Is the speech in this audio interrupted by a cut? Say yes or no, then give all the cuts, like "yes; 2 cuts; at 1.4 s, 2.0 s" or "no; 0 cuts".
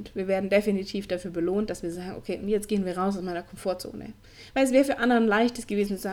no; 0 cuts